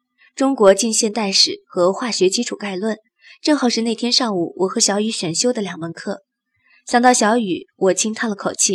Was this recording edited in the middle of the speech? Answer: no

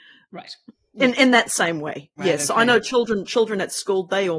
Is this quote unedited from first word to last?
yes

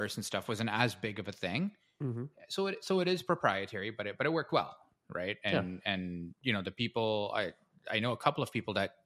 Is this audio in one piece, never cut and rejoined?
yes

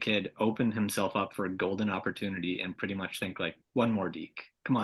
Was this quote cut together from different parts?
no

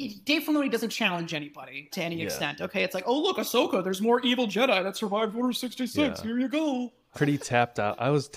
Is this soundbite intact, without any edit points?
no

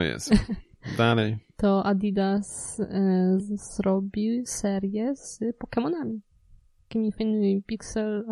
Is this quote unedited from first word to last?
yes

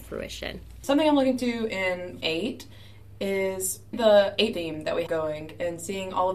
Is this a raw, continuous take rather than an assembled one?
no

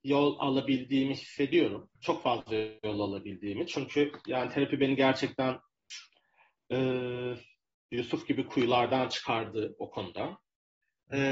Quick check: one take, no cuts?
no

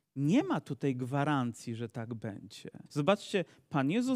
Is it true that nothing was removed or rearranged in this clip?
no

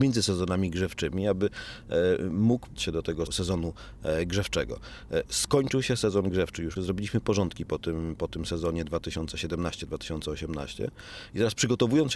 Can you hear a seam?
yes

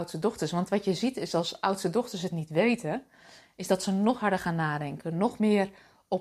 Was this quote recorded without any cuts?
yes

